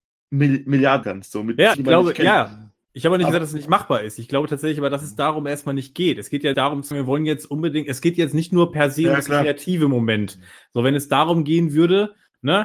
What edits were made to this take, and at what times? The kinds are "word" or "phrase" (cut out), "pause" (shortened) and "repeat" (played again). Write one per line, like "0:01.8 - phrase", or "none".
0:01.0 - word
0:01.7 - word
0:06.5 - word
0:06.9 - word

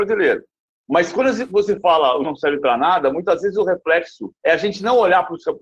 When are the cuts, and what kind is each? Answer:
0:02.2 - word
0:04.3 - pause

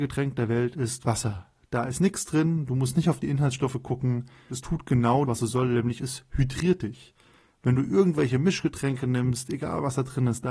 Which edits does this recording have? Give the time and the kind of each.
0:04.5 - word
0:05.2 - word

